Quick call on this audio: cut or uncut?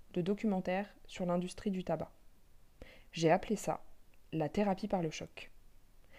uncut